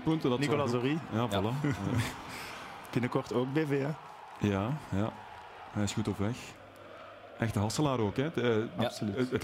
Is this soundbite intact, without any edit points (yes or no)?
yes